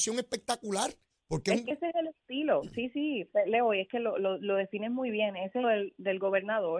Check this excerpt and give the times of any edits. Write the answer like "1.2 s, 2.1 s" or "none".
1.1 s, 5.6 s